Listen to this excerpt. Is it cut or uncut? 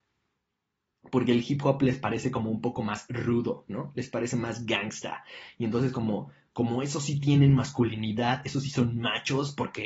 uncut